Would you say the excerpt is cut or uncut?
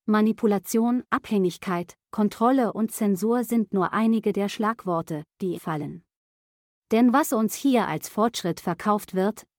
cut